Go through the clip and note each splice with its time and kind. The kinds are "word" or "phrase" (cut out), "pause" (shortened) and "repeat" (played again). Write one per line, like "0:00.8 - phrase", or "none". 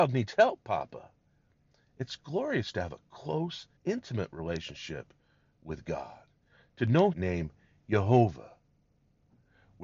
0:03.8 - pause
0:07.1 - phrase